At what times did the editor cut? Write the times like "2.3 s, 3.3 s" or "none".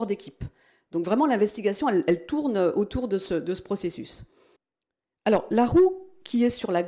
4.6 s